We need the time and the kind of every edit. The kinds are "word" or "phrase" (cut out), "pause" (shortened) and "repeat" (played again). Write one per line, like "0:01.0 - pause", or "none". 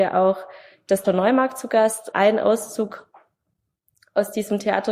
0:01.0 - word
0:02.1 - word